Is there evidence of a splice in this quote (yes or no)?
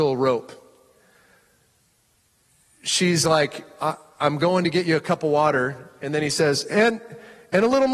no